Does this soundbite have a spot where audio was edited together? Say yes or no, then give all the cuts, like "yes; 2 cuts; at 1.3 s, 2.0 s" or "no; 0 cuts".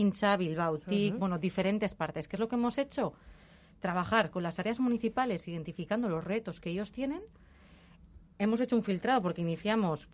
no; 0 cuts